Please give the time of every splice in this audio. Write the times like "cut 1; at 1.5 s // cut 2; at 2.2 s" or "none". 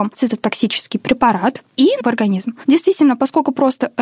cut 1; at 2.0 s